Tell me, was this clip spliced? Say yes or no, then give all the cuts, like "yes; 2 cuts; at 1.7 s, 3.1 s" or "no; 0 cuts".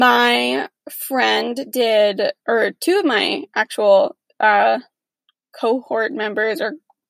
no; 0 cuts